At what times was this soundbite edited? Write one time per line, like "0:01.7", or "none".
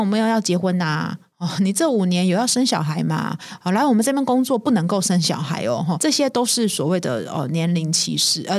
0:06.0